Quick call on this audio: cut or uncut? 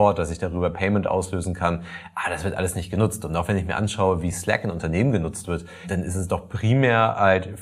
uncut